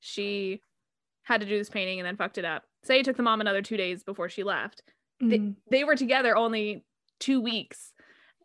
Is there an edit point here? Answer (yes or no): yes